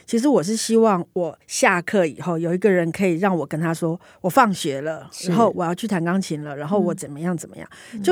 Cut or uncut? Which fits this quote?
cut